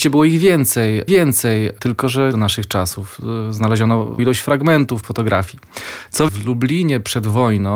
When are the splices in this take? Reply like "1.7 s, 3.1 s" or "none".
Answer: 1.1 s, 2.3 s, 4.2 s, 5.0 s, 6.3 s